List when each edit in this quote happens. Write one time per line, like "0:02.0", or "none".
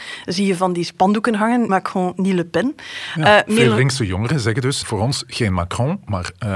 0:01.7
0:04.8